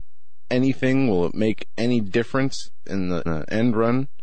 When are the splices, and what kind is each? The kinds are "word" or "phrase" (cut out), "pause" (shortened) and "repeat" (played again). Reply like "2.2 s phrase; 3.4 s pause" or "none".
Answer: 3.3 s word